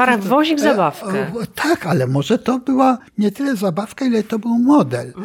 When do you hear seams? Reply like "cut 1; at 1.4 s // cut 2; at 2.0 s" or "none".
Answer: cut 1; at 3.1 s